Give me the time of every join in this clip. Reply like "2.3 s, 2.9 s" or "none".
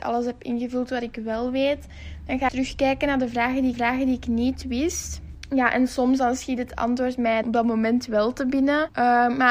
2.5 s, 3.7 s, 7.4 s